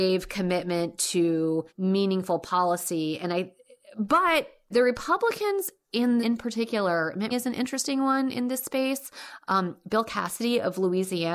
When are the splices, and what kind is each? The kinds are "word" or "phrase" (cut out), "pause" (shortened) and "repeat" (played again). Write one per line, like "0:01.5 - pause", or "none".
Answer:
0:01.7 - pause
0:04.7 - word
0:06.2 - phrase
0:07.3 - word

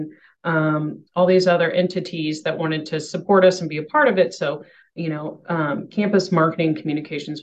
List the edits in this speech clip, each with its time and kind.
none

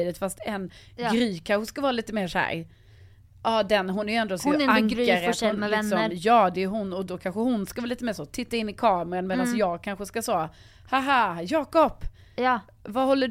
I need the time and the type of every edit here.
none

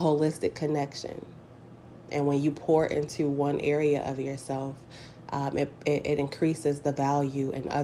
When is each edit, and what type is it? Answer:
none

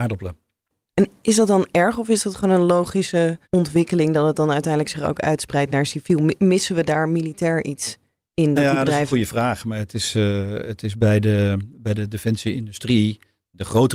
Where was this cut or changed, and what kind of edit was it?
0:03.4 - pause

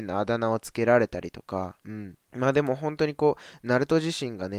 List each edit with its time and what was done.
0:02.2 - pause

